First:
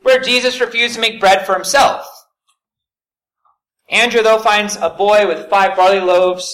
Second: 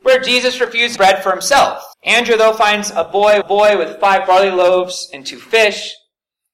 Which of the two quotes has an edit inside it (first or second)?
second